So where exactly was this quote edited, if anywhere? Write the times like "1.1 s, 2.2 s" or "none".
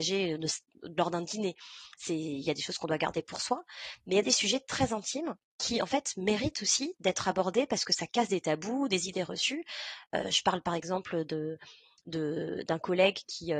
none